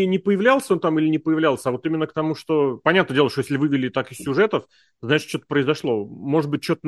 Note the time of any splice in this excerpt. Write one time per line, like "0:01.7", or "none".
none